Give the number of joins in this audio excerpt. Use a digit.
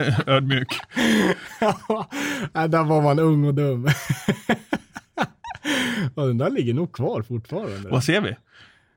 0